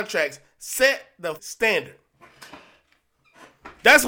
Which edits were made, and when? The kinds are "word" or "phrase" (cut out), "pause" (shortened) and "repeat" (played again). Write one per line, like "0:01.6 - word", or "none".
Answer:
0:01.4 - word